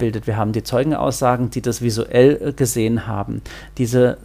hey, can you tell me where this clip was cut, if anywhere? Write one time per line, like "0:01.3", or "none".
none